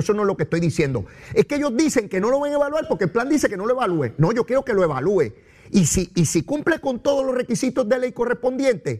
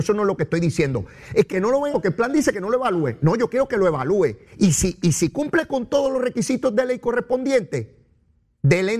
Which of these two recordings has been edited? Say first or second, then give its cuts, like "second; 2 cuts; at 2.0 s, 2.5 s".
second; 3 cuts; at 1.5 s, 1.9 s, 4.5 s